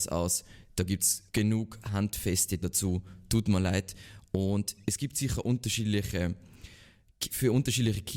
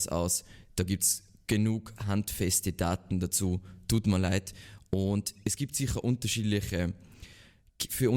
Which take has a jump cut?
first; 2 cuts; at 1.3 s, 2.6 s

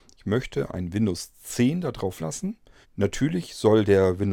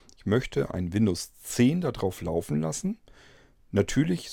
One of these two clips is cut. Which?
first; 2 cuts; at 2.2 s, 2.8 s

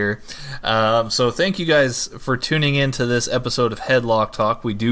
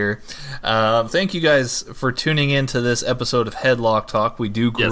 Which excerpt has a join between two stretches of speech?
second; 1 cut; at 1.1 s

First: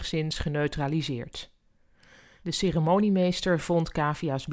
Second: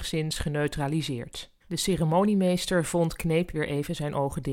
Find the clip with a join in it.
second; 2 cuts; at 1.6 s, 3.2 s

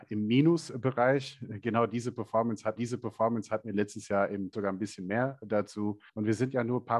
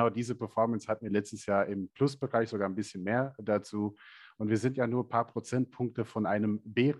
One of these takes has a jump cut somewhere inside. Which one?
first; 3 cuts; at 2.8 s, 4.5 s, 6.1 s

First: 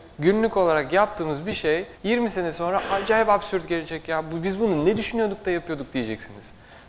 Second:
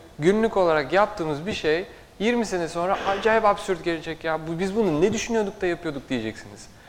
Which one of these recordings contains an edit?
first; 1 cut; at 1.9 s

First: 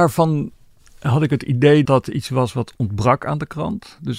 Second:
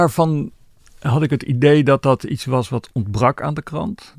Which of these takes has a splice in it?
first; 1 cut; at 1.8 s

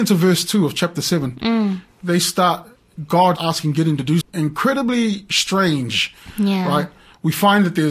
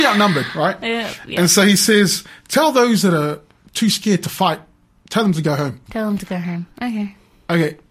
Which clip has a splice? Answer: first; 2 cuts; at 3.4 s, 4.2 s

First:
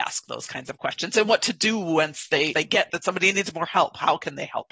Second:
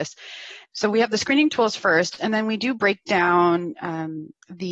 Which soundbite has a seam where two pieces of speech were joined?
first; 2 cuts; at 2.5 s, 2.9 s

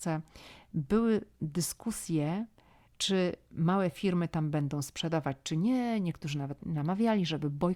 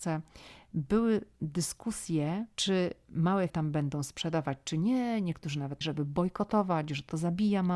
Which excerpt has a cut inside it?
second; 3 cuts; at 2.5 s, 3.5 s, 5.8 s

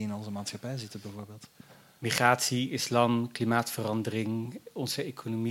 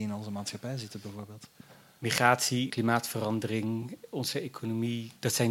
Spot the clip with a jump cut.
second; 1 cut; at 2.7 s

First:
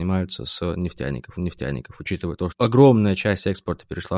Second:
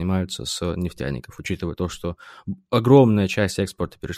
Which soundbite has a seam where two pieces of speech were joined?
first; 2 cuts; at 1.4 s, 2.5 s

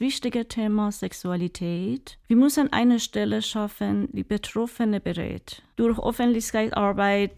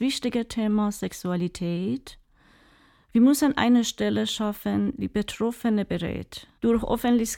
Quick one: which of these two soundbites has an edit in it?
first; 1 cut; at 2.2 s

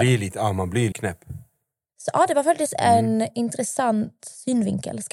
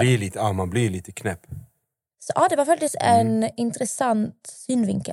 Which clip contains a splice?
first; 1 cut; at 0.9 s

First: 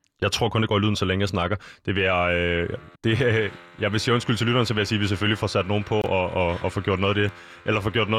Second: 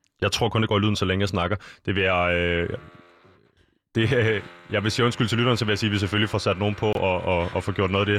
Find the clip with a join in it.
first; 1 cut; at 2.9 s

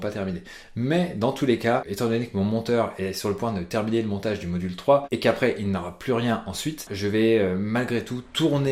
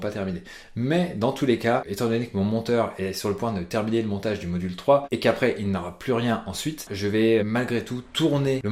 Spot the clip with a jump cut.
second; 1 cut; at 7.4 s

